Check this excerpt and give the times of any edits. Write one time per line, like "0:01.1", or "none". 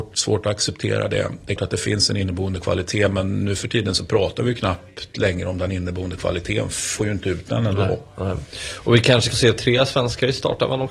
0:01.6
0:07.0
0:09.3